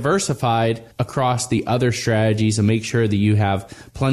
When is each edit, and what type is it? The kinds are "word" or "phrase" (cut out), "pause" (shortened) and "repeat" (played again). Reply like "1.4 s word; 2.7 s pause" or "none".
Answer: 0.9 s pause